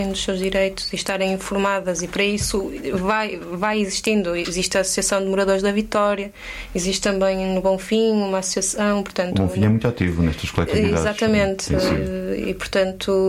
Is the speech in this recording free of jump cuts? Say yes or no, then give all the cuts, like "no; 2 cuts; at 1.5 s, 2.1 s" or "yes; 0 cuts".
yes; 0 cuts